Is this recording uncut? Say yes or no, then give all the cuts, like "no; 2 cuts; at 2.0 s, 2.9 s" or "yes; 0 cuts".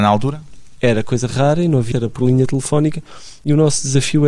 no; 1 cut; at 1.9 s